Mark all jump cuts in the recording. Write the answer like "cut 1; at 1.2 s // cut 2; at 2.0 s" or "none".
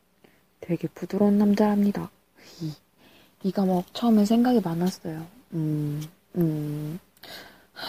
none